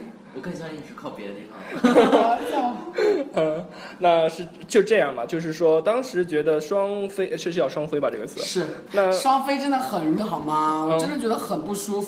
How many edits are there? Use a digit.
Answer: 2